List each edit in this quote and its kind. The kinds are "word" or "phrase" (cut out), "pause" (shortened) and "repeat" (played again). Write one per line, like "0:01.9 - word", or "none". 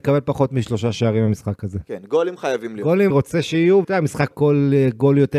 0:03.1 - word
0:03.8 - word
0:04.3 - word

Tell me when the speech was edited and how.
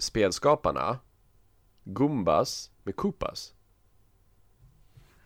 0:02.7 - pause

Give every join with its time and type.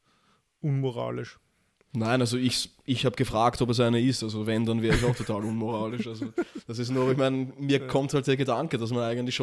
none

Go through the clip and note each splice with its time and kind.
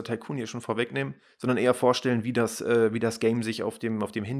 none

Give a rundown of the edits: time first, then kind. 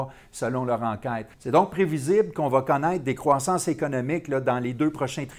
0:01.3 - pause

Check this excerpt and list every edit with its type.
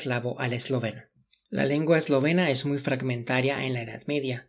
none

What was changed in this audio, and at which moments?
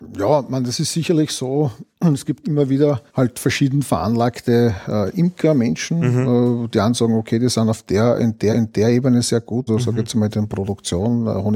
0:02.4 - word
0:03.1 - pause
0:08.5 - repeat
0:09.7 - word

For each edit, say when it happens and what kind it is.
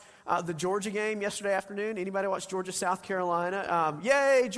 none

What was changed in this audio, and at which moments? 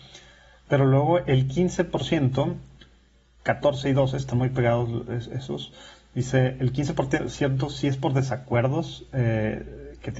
none

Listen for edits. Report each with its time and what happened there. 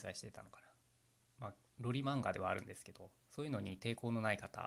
0:03.2 - pause

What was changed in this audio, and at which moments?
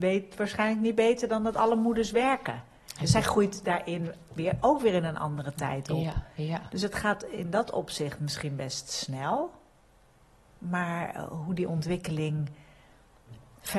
none

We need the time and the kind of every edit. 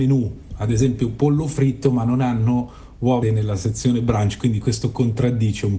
0:03.2 - word

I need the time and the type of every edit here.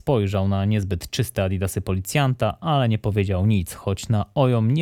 none

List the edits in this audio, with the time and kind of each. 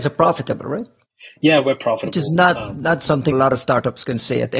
0:03.3 - word

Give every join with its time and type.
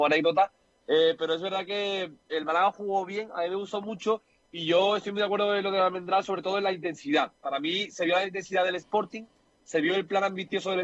none

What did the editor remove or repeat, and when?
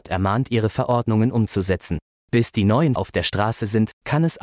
0:03.0 - word

